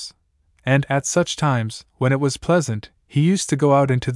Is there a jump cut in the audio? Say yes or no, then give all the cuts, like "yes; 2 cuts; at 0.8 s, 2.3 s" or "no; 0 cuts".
no; 0 cuts